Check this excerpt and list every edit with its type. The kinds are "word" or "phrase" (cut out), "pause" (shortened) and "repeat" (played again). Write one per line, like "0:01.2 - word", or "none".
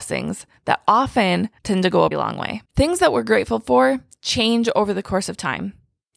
0:01.6 - pause
0:02.1 - word
0:02.6 - pause